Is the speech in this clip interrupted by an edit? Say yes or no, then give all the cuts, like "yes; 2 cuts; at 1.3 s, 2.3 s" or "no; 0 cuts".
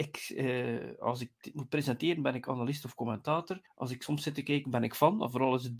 yes; 1 cut; at 3.7 s